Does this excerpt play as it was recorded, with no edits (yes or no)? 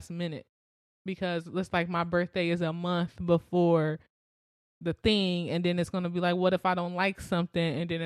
yes